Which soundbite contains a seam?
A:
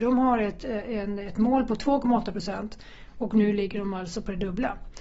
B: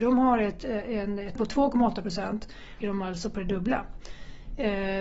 B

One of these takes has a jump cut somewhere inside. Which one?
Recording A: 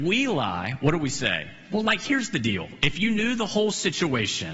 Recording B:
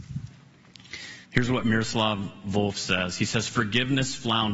B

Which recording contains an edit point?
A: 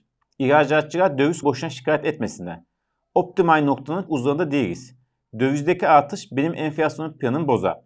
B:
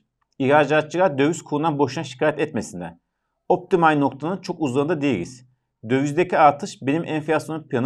A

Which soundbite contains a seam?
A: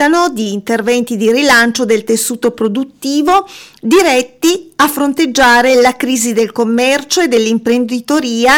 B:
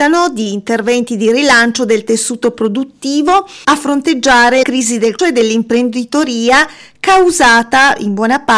B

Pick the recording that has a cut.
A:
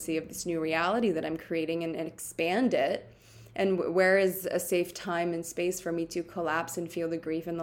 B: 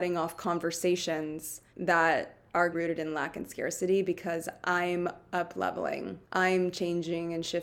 B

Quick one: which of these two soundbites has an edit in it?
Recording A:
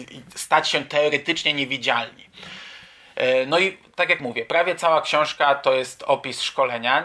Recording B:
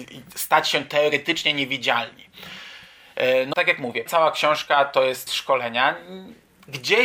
B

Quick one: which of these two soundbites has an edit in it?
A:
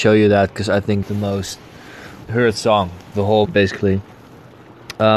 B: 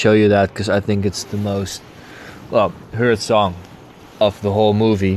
A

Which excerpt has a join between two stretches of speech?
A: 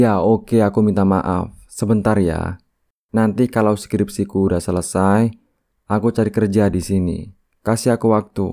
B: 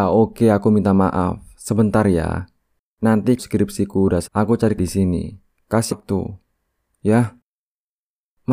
B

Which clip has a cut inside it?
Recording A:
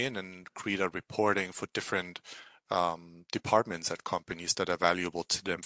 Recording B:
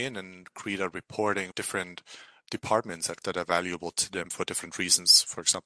B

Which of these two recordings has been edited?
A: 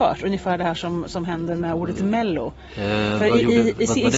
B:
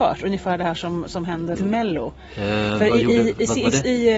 B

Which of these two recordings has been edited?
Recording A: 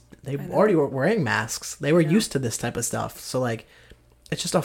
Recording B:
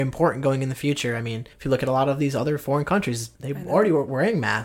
B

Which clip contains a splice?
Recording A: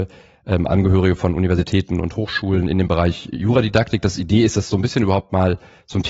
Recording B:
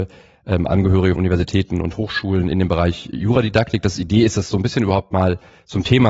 B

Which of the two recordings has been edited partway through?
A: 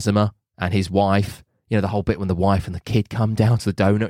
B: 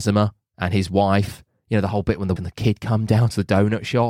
B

